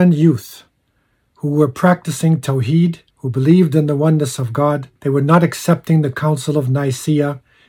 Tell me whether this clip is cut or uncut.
cut